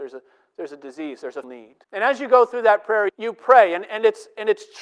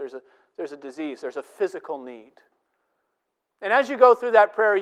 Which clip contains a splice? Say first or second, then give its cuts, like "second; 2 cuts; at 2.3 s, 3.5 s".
first; 3 cuts; at 1.4 s, 1.8 s, 3.1 s